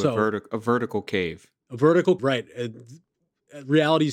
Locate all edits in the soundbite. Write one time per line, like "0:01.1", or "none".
0:01.6
0:02.2